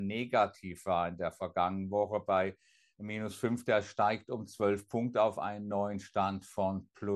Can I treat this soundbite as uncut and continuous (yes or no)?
yes